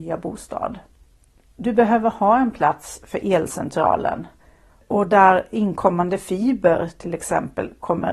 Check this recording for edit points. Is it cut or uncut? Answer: uncut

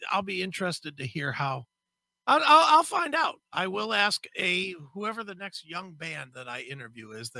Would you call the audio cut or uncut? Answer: uncut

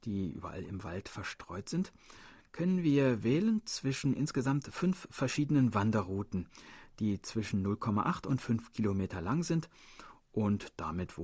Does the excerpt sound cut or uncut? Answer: uncut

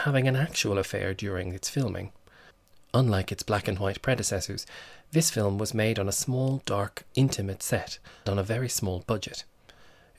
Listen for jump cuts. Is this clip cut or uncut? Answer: cut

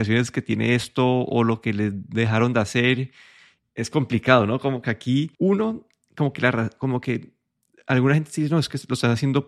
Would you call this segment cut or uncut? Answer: cut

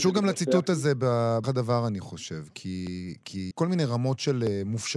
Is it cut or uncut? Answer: cut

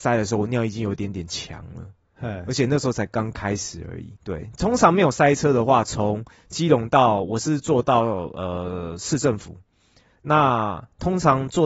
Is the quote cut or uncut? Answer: cut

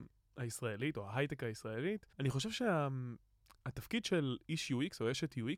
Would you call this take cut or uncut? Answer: cut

